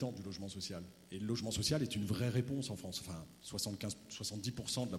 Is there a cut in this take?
no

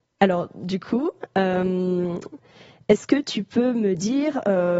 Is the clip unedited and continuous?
yes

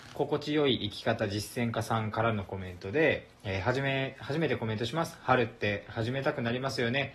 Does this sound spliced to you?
yes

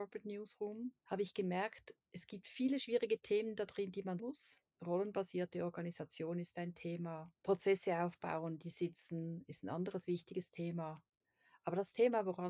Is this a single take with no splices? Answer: no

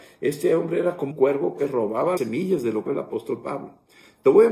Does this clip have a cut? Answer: yes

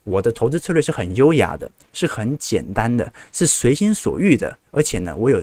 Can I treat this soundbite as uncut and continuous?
yes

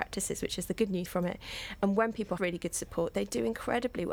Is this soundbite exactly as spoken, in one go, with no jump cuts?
no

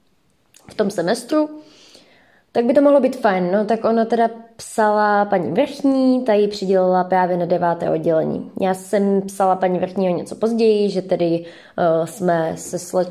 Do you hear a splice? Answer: no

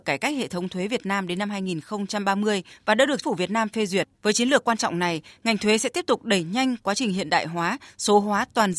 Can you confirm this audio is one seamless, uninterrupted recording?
no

